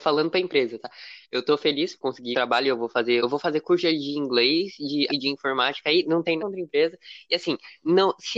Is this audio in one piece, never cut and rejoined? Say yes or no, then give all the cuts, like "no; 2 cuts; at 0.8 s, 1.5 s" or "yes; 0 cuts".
no; 6 cuts; at 2.0 s, 2.3 s, 3.2 s, 5.1 s, 6.0 s, 6.4 s